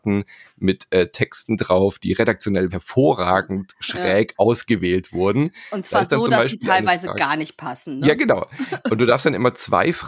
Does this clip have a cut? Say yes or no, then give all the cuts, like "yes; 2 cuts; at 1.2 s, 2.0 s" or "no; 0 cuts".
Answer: yes; 1 cut; at 2.7 s